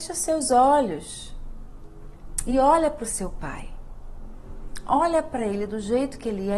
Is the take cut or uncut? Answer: uncut